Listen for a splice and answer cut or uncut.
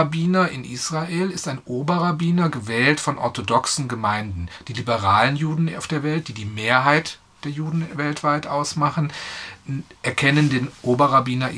uncut